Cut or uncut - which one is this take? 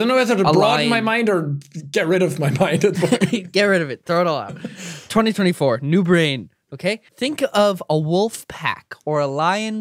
cut